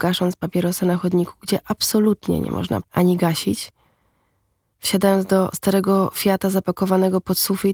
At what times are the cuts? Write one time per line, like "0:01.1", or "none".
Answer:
0:02.8